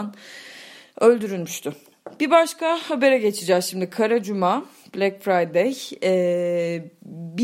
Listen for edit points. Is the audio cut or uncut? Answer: uncut